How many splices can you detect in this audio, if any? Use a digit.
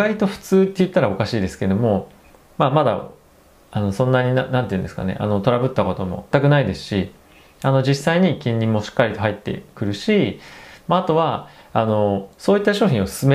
1